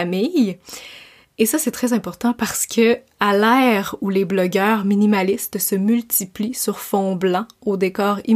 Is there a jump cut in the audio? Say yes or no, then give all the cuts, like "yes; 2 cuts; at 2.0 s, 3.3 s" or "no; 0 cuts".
no; 0 cuts